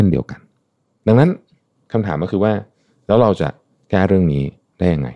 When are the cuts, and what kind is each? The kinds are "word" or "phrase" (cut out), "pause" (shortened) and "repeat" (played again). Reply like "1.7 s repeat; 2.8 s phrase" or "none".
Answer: none